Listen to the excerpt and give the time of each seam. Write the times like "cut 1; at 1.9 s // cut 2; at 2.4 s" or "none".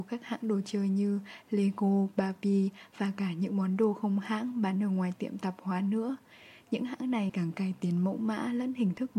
cut 1; at 7.3 s